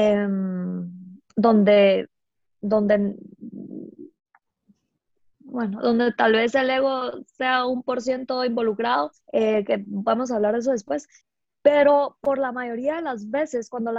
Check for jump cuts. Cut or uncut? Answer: cut